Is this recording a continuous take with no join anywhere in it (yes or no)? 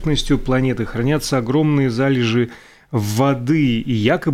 yes